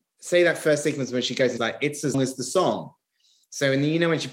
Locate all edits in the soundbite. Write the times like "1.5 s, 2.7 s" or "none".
1.6 s, 2.1 s